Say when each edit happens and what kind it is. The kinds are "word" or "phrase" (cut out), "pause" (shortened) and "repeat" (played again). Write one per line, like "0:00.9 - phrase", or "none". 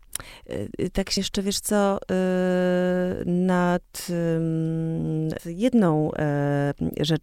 0:01.2 - word
0:05.4 - word